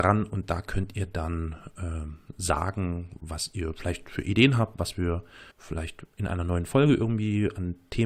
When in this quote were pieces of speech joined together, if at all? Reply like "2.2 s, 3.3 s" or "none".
5.5 s